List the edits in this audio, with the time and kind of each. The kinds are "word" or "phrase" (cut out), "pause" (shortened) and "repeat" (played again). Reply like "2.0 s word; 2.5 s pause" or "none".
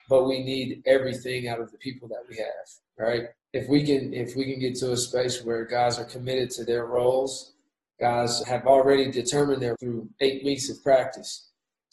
3.4 s pause; 8.4 s word; 9.8 s word